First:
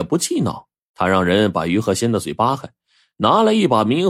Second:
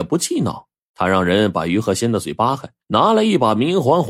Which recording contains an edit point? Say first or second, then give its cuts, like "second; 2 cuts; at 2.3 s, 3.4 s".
second; 1 cut; at 2.8 s